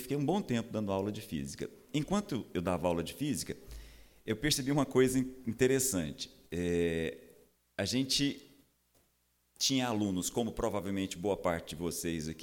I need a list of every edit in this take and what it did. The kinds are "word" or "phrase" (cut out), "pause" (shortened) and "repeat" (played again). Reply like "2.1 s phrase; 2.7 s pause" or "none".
none